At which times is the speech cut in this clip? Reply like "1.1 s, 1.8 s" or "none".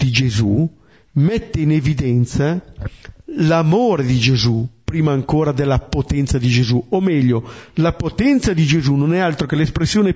none